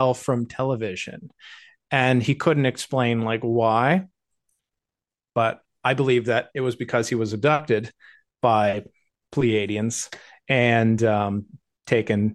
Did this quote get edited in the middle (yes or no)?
no